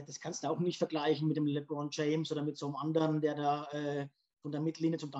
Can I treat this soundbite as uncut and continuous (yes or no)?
yes